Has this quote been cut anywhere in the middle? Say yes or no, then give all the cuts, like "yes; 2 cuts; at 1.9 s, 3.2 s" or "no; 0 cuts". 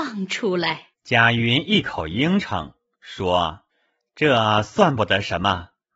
yes; 2 cuts; at 0.9 s, 3.7 s